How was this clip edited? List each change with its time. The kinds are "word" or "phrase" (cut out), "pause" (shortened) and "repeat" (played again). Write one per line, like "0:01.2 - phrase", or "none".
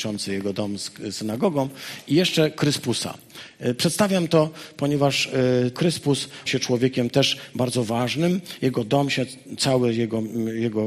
0:05.7 - word
0:06.5 - word